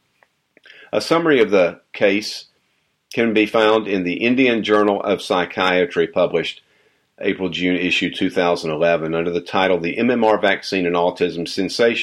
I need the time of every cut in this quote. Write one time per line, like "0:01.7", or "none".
none